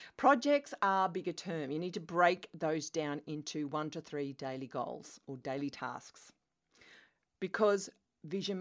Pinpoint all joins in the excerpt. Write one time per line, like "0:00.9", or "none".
none